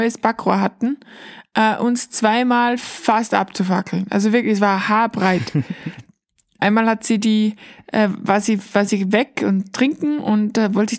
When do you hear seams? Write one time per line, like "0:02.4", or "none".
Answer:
0:06.6